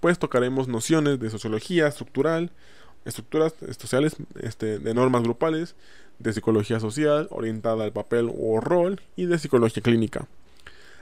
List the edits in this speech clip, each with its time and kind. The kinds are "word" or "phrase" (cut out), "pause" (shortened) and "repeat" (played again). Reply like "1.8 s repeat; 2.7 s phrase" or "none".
none